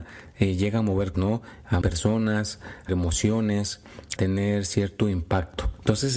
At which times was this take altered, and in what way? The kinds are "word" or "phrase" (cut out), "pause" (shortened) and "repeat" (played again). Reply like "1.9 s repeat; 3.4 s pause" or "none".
1.1 s word; 1.8 s word; 2.9 s word; 4.2 s word